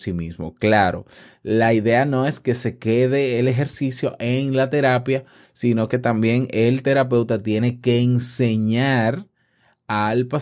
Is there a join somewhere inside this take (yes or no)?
no